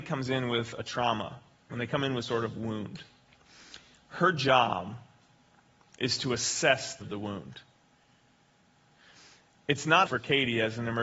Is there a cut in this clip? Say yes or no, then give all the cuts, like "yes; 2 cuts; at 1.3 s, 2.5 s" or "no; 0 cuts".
yes; 3 cuts; at 2.2 s, 7.0 s, 10.1 s